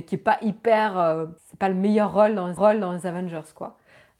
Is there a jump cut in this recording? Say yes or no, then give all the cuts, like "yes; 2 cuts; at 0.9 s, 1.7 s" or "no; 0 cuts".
yes; 2 cuts; at 1.4 s, 2.6 s